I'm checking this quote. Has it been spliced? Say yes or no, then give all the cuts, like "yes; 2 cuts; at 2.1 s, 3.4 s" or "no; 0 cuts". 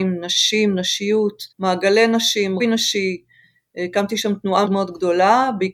yes; 3 cuts; at 1.5 s, 2.6 s, 4.6 s